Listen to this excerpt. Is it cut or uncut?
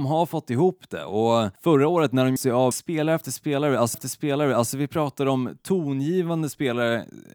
cut